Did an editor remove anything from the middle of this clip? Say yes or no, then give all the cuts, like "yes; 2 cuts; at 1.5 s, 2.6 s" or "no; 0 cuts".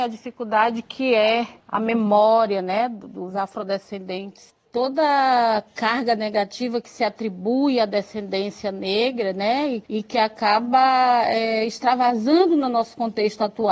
yes; 1 cut; at 9.8 s